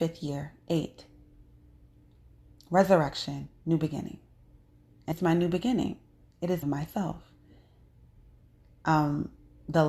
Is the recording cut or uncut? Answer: cut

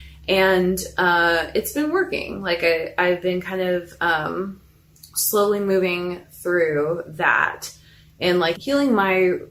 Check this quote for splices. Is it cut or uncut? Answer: cut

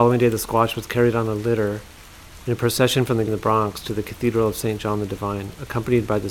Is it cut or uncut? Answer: cut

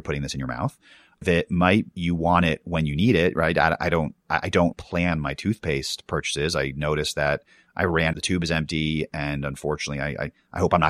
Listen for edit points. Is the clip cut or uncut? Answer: cut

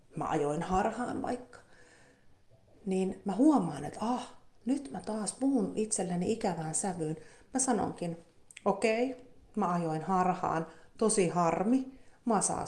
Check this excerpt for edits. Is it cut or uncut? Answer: uncut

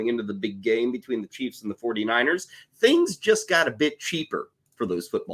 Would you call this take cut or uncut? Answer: uncut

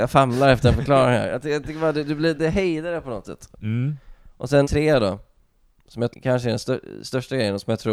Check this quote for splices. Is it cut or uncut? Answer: cut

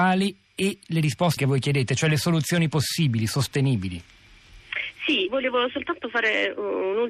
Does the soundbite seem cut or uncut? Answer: cut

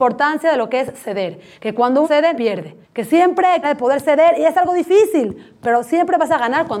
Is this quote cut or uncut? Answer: cut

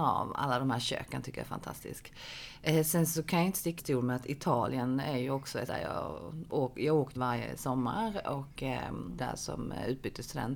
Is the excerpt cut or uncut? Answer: cut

